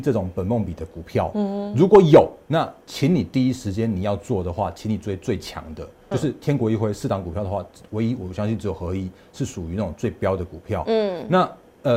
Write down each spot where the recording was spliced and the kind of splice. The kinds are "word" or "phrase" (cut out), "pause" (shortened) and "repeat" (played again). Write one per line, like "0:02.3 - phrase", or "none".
0:02.4 - pause
0:06.1 - word

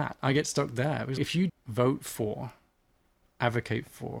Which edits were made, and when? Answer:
0:01.2 - word
0:01.5 - word

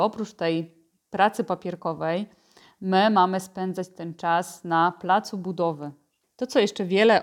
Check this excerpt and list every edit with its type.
none

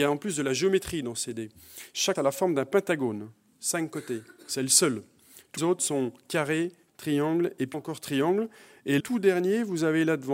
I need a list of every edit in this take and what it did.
0:02.2 - word
0:05.6 - word
0:06.9 - word
0:07.7 - word
0:09.0 - word

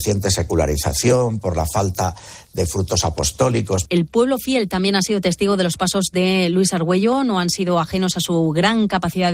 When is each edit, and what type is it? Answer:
none

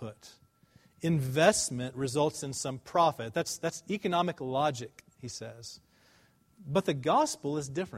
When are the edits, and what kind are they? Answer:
none

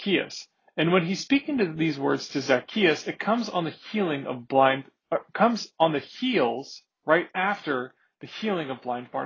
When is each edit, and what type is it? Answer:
none

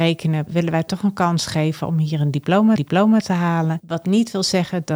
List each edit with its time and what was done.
0:02.8 - repeat

